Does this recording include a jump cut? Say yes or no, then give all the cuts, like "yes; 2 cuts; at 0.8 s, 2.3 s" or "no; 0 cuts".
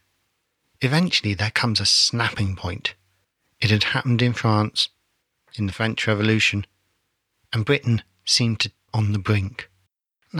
yes; 1 cut; at 8.9 s